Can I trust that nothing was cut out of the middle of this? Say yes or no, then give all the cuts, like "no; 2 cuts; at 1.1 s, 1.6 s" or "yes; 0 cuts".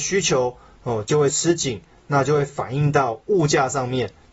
yes; 0 cuts